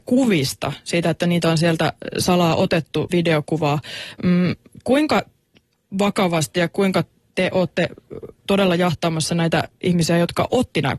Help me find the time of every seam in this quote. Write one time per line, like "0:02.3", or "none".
0:03.1
0:07.3